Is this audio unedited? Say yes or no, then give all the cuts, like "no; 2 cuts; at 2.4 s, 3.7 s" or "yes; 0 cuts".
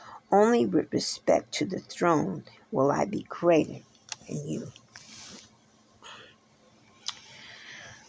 yes; 0 cuts